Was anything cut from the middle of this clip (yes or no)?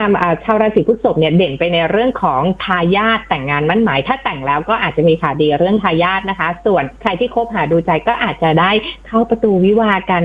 yes